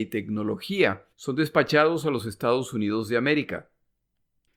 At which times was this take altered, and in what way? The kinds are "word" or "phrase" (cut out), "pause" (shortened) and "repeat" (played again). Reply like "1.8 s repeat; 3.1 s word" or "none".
1.1 s pause

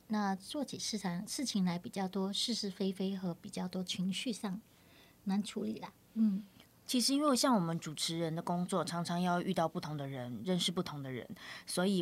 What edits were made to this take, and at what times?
none

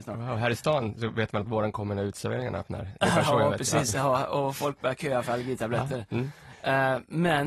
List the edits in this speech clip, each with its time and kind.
none

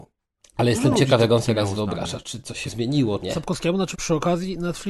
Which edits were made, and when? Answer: 1.4 s word; 2.7 s word; 3.2 s word; 3.9 s word

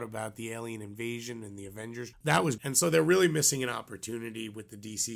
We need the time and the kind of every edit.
2.1 s phrase; 2.6 s word

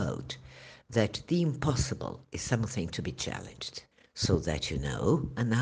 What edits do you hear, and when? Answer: 3.9 s pause

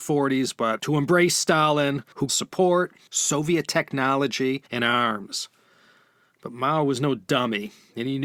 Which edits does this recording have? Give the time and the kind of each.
2.3 s phrase

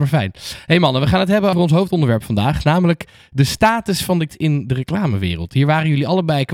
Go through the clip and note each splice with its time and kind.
1.5 s word; 4.3 s word

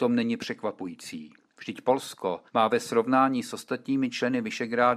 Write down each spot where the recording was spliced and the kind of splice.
2.5 s pause

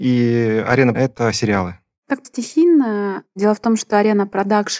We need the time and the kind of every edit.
0.9 s word; 2.2 s word

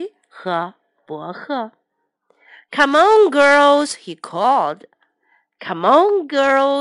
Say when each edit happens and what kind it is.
none

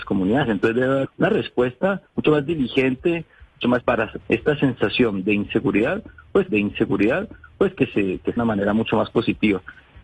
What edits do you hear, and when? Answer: 1.1 s word; 2.1 s pause; 3.8 s word; 4.2 s word; 6.5 s repeat; 8.4 s phrase

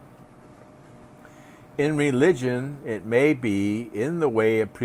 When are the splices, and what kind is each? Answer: none

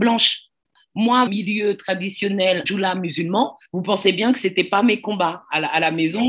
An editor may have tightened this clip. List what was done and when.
1.3 s phrase; 2.6 s word; 3.6 s pause

